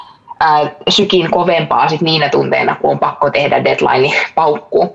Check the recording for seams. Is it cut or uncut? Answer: uncut